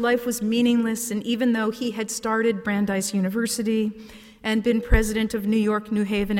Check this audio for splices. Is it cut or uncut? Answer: uncut